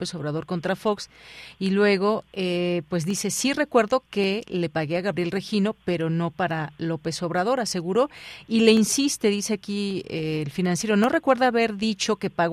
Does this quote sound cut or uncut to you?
uncut